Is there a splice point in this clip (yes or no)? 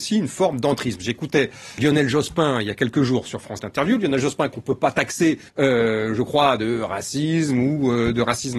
yes